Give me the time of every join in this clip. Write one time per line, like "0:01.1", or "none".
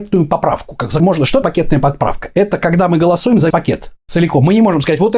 0:01.0
0:01.4
0:03.5